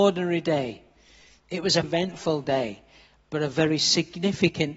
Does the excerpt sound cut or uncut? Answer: cut